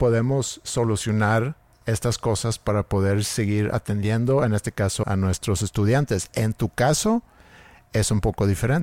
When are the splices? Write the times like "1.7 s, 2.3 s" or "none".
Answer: 1.7 s, 5.0 s